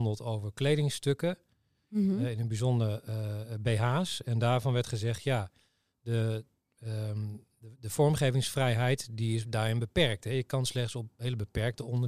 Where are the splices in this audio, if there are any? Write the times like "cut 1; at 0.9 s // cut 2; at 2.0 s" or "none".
none